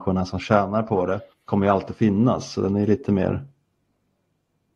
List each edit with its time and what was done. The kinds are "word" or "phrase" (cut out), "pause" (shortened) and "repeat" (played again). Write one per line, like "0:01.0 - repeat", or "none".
0:01.3 - pause